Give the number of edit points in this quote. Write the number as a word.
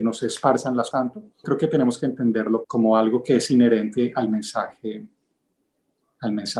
three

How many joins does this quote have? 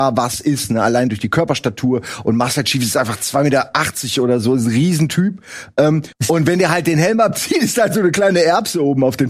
one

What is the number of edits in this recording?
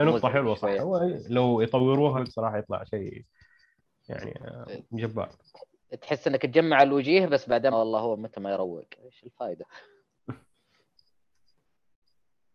four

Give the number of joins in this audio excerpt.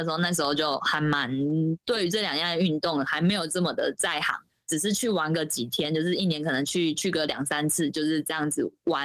zero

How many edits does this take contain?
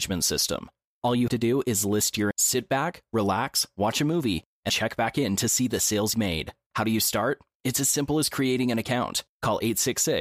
four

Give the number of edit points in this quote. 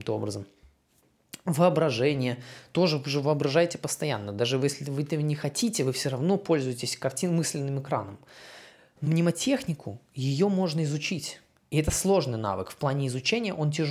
one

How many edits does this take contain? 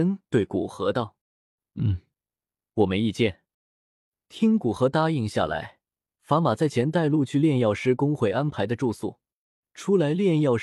two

